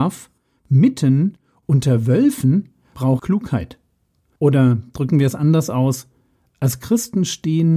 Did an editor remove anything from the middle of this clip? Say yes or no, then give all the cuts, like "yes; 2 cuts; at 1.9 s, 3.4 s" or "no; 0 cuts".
yes; 1 cut; at 3.2 s